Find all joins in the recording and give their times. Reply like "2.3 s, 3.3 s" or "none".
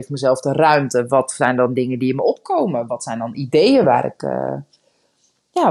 none

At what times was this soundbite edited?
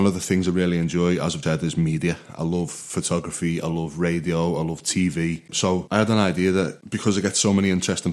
1.4 s

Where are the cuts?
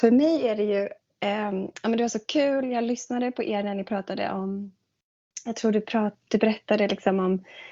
none

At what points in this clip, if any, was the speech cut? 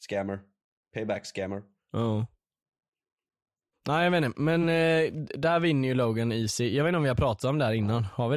none

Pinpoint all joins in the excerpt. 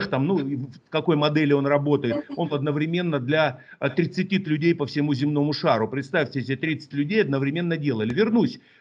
2.5 s, 4.4 s, 6.9 s

